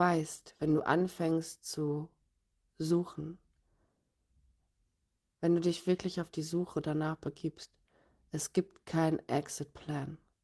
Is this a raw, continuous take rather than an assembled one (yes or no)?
yes